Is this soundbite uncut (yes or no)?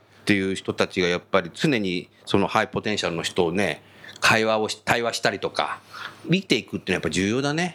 yes